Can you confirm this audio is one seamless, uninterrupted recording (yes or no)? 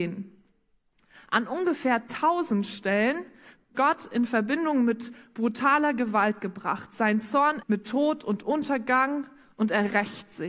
no